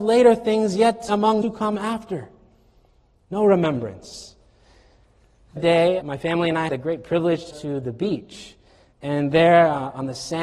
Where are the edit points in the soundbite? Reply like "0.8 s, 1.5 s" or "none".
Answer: 1.1 s, 1.4 s, 5.6 s, 6.0 s, 6.7 s, 7.5 s

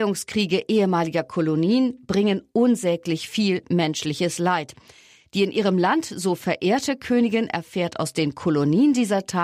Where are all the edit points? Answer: none

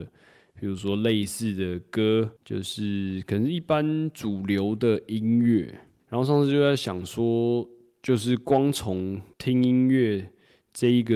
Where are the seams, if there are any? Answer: 2.4 s, 9.3 s

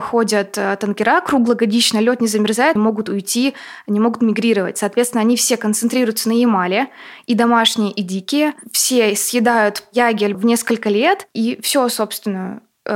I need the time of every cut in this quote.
2.8 s, 10.3 s

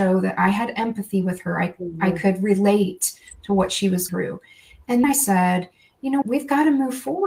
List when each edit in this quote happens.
4.1 s, 5.0 s, 6.2 s

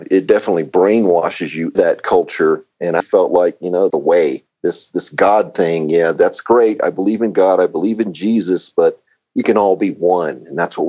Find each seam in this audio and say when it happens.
1.8 s, 3.0 s, 3.9 s, 4.5 s

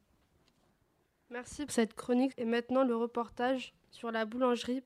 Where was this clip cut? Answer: 1.7 s, 2.3 s

